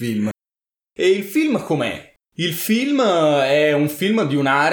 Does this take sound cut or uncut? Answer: cut